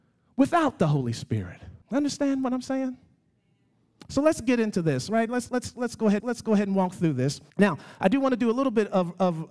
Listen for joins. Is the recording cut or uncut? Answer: cut